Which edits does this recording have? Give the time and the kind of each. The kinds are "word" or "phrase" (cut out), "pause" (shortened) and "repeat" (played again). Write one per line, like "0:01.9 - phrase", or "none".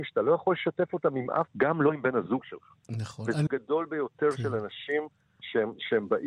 0:01.5 - word
0:03.5 - word